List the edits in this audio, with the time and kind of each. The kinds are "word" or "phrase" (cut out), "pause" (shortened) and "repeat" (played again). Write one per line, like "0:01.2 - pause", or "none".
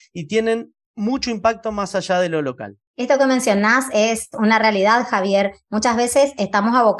0:02.9 - pause